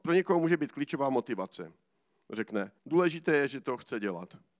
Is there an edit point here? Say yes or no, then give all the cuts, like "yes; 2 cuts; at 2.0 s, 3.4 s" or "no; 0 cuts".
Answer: yes; 1 cut; at 2.8 s